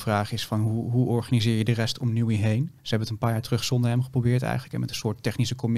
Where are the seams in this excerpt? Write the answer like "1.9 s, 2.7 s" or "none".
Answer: 2.8 s